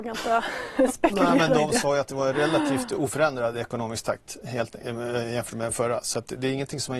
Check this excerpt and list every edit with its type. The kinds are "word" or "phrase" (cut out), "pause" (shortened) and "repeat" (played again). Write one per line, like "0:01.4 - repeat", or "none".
none